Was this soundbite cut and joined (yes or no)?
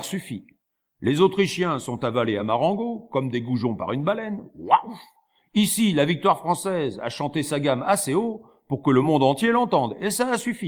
no